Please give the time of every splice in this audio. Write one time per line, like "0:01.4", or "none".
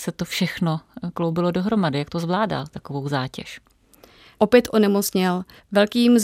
none